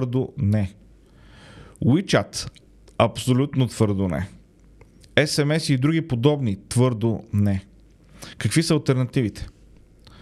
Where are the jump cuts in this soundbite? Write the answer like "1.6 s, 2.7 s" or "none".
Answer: none